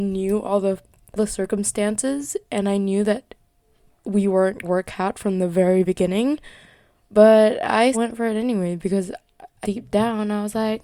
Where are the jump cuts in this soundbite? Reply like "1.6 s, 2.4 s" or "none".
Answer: 1.2 s, 4.6 s, 5.8 s, 7.9 s, 9.6 s

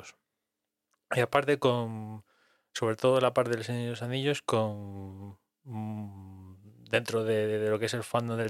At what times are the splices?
none

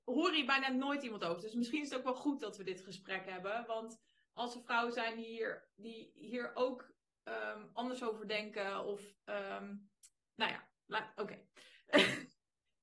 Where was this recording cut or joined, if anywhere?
none

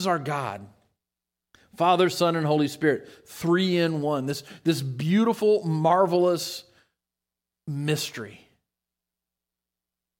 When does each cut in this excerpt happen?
none

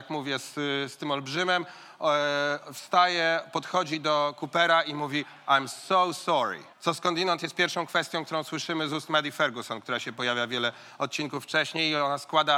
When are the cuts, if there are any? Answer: 6.7 s

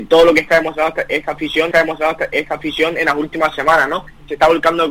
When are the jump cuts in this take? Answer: 1.7 s

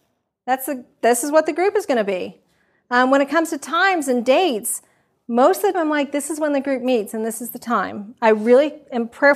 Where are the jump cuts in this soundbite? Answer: 5.7 s

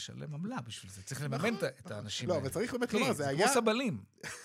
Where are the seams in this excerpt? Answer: none

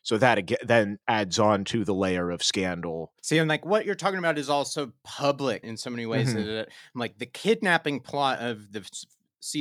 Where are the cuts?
1.0 s, 3.2 s, 5.6 s

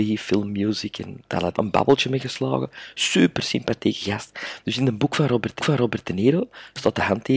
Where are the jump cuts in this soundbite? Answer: 1.5 s, 5.6 s

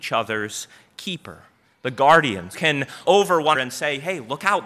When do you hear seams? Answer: 2.5 s, 3.0 s, 3.5 s

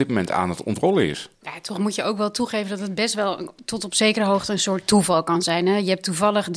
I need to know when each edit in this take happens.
1.3 s

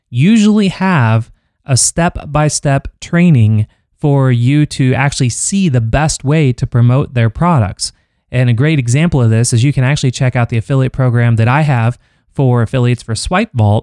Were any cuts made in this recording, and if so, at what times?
none

